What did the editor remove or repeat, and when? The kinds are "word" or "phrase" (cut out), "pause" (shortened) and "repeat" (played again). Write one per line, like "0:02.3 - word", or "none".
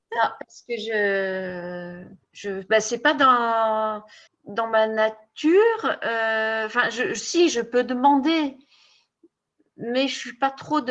0:02.2 - pause
0:04.3 - pause